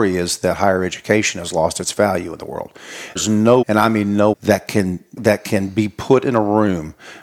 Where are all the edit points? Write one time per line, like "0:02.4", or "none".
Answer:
0:03.2
0:03.6
0:04.3
0:05.2